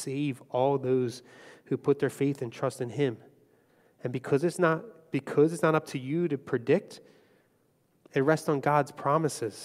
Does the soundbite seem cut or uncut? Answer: uncut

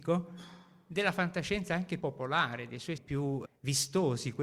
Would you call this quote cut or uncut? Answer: cut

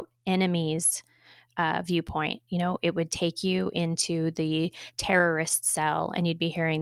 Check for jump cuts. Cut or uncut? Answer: uncut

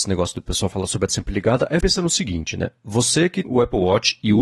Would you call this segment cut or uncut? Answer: cut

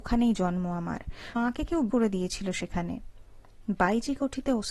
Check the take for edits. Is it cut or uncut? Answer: cut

